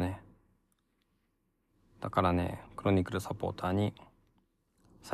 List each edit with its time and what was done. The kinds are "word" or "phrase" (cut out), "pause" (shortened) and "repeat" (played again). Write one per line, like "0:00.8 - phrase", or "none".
0:02.7 - pause